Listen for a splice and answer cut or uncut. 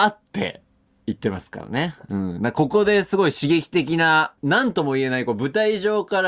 cut